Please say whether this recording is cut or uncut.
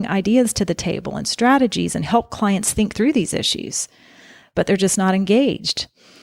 uncut